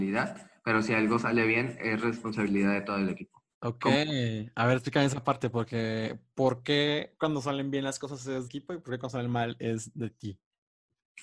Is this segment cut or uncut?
cut